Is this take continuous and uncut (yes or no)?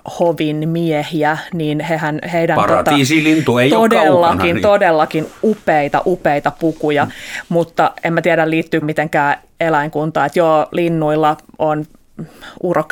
no